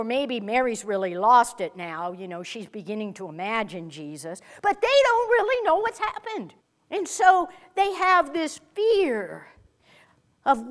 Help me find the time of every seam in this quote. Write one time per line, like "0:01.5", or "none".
0:06.6